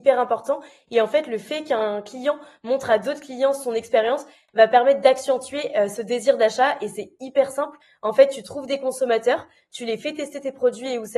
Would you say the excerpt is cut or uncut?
uncut